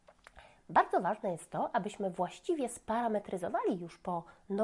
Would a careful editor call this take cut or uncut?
uncut